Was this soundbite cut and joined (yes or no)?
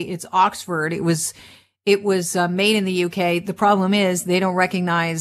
no